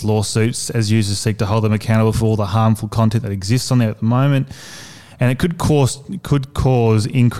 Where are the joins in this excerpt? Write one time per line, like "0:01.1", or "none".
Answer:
none